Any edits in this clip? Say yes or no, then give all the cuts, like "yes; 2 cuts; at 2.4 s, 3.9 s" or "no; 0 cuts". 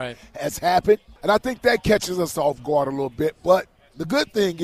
yes; 1 cut; at 1.2 s